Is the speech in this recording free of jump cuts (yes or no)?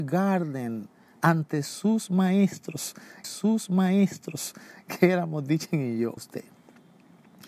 no